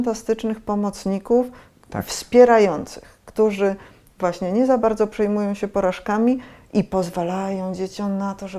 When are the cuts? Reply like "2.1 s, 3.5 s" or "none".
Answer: none